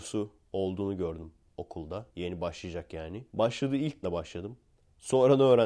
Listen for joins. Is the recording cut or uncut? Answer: cut